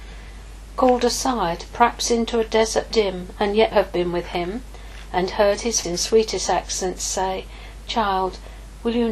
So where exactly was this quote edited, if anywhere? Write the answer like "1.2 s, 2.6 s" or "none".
2.9 s, 3.7 s, 5.8 s